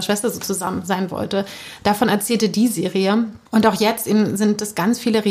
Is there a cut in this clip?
yes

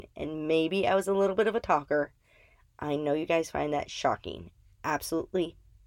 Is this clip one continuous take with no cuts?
yes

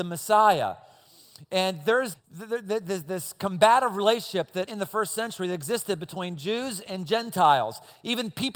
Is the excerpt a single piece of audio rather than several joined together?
no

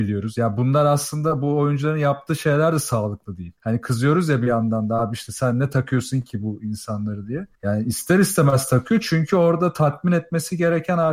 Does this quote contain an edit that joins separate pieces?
yes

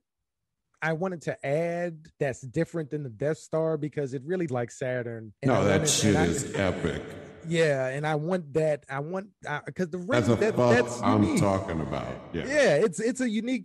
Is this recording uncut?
no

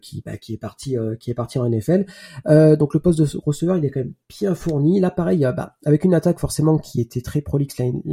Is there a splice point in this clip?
yes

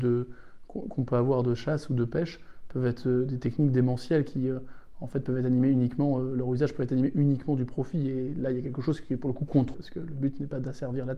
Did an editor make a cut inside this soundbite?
yes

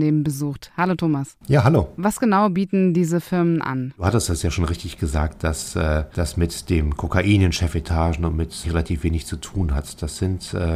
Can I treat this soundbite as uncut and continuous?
no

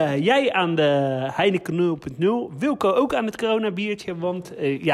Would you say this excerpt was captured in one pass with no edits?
yes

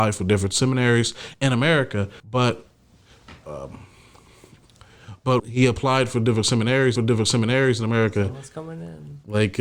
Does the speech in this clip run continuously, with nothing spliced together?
no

